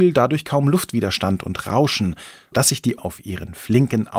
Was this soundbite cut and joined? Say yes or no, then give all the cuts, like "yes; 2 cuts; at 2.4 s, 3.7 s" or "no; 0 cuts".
yes; 2 cuts; at 2.5 s, 3.0 s